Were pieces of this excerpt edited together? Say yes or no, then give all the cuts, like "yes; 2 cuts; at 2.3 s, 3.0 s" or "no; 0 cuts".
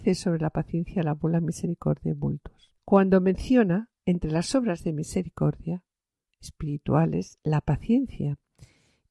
no; 0 cuts